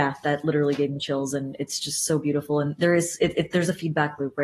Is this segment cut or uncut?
uncut